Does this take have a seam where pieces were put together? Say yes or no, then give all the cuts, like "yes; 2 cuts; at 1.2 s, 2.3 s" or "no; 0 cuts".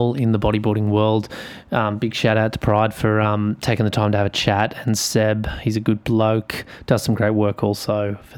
no; 0 cuts